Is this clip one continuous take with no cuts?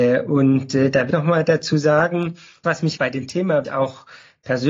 no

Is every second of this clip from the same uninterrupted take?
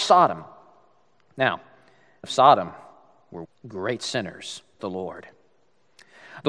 no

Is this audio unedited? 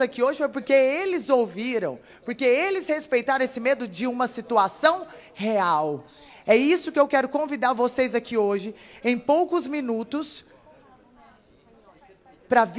yes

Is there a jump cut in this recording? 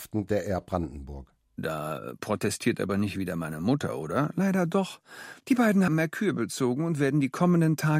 yes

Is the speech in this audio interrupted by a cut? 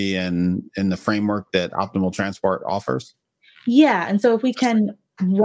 no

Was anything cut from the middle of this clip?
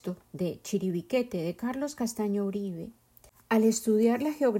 no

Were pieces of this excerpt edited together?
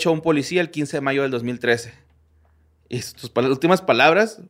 no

